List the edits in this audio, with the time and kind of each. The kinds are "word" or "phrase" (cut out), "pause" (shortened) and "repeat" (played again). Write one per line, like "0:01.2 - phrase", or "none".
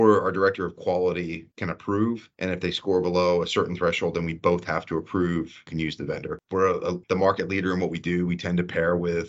0:01.5 - pause
0:02.3 - pause
0:05.7 - phrase
0:07.0 - pause